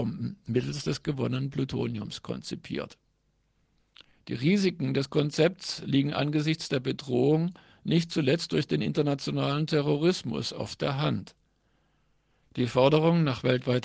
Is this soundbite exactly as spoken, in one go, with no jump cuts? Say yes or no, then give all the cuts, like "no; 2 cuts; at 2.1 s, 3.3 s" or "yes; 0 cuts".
yes; 0 cuts